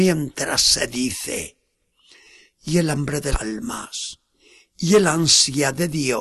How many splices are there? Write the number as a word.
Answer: one